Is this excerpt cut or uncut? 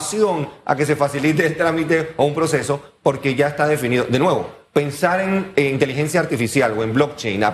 uncut